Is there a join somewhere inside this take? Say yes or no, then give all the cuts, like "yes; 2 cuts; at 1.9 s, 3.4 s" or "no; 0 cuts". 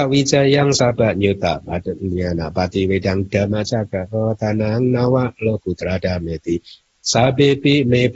no; 0 cuts